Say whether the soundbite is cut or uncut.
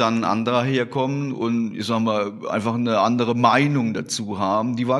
uncut